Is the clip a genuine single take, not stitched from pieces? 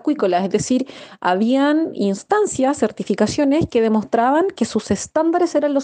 yes; 0 cuts

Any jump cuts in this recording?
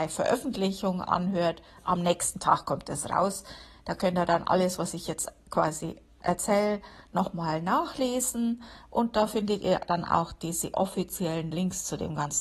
no; 0 cuts

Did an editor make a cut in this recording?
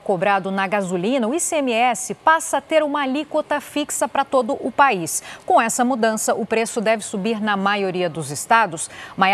no; 0 cuts

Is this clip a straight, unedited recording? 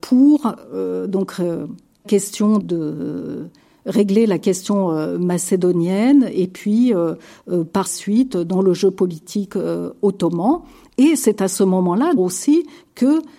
no; 4 cuts; at 2.0 s, 2.6 s, 7.9 s, 12.2 s

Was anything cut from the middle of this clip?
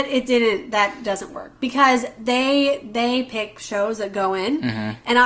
no; 0 cuts

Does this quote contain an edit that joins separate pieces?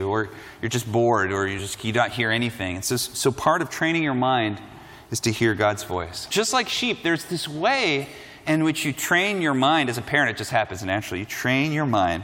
no; 0 cuts

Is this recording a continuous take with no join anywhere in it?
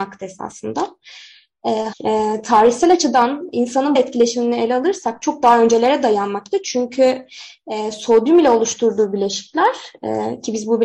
no; 2 cuts; at 1.9 s, 4.0 s

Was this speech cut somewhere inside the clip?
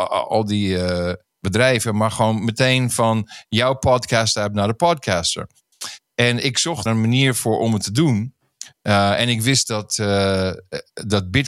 yes; 1 cut; at 6.9 s

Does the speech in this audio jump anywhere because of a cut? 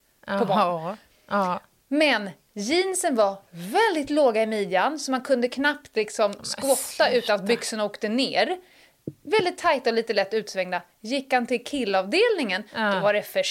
no; 0 cuts

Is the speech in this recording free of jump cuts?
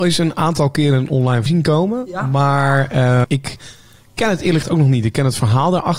no; 3 cuts; at 1.5 s, 3.2 s, 4.6 s

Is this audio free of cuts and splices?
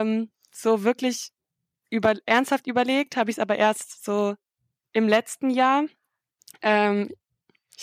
yes; 0 cuts

